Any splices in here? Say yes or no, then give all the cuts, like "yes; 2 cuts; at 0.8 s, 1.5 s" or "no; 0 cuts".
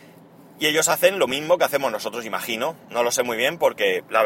no; 0 cuts